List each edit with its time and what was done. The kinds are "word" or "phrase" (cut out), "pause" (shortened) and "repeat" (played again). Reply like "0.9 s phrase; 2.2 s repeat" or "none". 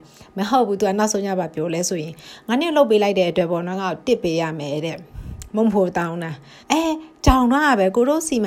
6.6 s pause